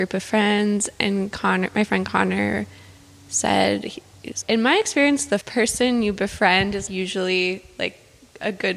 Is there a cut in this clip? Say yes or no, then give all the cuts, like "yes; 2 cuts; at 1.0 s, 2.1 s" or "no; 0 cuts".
yes; 3 cuts; at 4.4 s, 5.4 s, 6.9 s